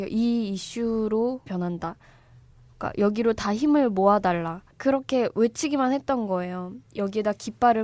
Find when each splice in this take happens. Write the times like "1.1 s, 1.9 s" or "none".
1.5 s, 4.7 s